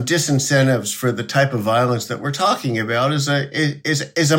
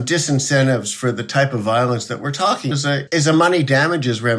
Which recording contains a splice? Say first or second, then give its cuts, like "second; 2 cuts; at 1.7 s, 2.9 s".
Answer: second; 2 cuts; at 2.7 s, 3.1 s